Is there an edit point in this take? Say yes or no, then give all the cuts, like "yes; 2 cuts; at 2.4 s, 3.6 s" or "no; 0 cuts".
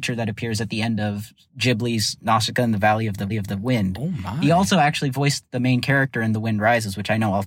yes; 1 cut; at 3.3 s